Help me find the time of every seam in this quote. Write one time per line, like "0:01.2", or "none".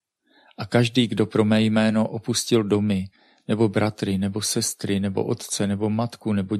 none